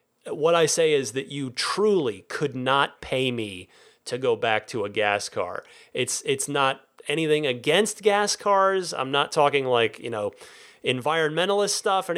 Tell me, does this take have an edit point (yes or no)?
no